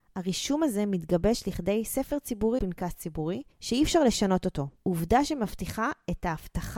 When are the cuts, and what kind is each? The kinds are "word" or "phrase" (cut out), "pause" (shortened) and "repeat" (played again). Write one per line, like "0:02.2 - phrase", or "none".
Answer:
0:02.6 - word
0:03.5 - pause
0:04.8 - pause